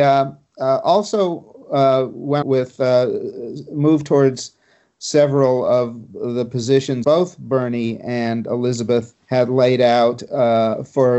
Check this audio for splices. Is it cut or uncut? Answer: cut